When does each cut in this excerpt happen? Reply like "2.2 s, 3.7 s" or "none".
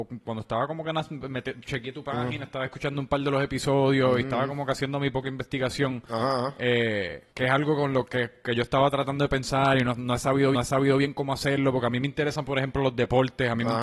7.3 s, 10.5 s